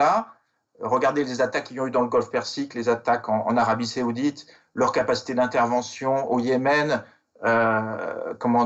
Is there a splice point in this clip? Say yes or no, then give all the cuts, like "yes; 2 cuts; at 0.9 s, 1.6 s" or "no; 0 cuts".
no; 0 cuts